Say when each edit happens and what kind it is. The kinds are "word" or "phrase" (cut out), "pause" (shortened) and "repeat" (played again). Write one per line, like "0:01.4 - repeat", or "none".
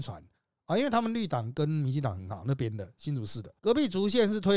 0:03.6 - pause

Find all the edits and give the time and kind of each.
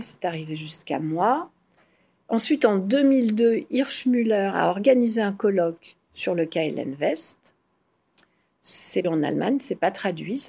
0:09.0 - word

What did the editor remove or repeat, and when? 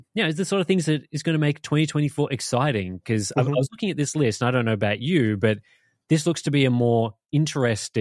none

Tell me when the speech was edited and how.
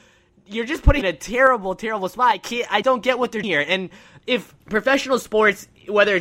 0:01.0 - phrase
0:02.8 - word
0:03.4 - word
0:04.6 - pause

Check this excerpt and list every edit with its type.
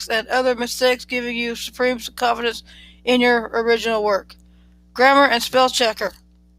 none

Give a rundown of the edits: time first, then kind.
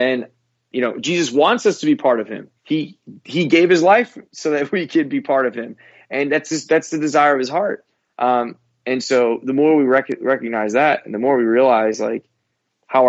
0:02.6 - pause
0:04.3 - pause

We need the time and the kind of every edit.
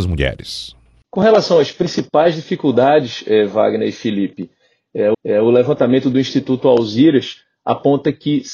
0:05.1 - repeat

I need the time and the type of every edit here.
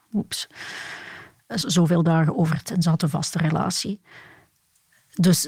0:01.6 - word
0:02.6 - word

